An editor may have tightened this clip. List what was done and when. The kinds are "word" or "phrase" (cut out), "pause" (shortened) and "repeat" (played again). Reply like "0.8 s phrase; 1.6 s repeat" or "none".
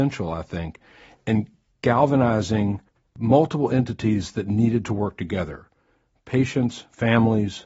none